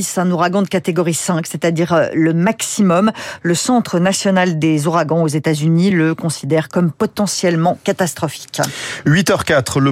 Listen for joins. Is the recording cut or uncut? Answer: uncut